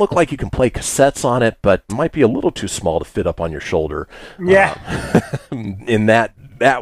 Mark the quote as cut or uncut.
cut